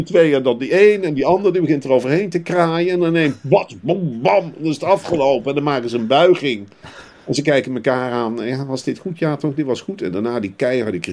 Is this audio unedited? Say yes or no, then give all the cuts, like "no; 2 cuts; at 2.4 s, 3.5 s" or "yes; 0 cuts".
yes; 0 cuts